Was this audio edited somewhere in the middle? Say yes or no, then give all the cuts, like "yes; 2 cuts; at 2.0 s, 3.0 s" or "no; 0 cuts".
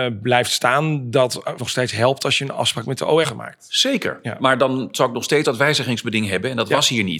yes; 3 cuts; at 1.6 s, 3.2 s, 5.4 s